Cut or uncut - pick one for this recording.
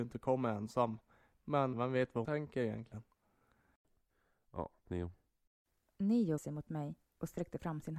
cut